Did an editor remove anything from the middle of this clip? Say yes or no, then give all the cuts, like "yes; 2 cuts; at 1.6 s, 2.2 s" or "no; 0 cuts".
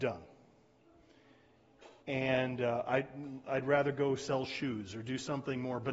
yes; 1 cut; at 2.0 s